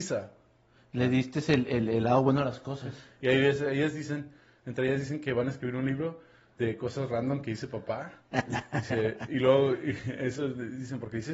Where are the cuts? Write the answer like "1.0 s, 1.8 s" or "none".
none